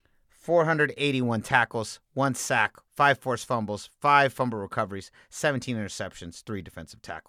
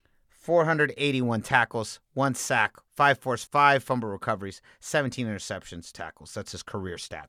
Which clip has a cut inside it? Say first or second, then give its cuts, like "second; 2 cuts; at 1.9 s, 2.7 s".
second; 2 cuts; at 3.5 s, 5.9 s